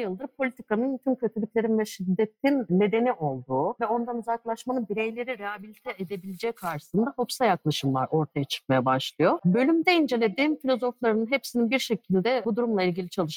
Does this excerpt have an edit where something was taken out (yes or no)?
no